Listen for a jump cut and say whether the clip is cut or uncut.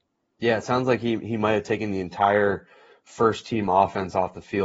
uncut